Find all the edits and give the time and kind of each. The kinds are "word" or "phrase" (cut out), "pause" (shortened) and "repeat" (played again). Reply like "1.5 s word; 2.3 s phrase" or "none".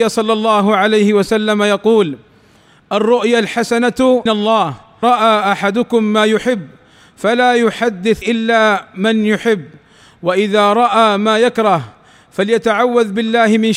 4.3 s word; 5.0 s word; 8.2 s word